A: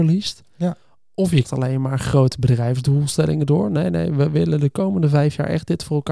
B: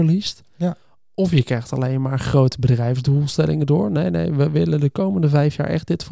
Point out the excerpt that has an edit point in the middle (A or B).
A